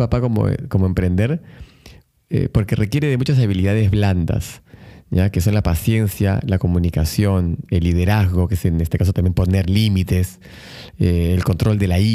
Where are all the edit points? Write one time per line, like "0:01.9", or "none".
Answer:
none